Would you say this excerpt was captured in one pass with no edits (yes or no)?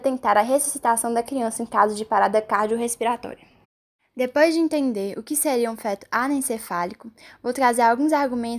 yes